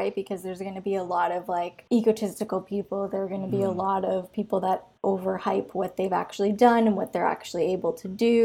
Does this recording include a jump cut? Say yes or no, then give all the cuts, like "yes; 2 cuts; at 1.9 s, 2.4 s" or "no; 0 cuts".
no; 0 cuts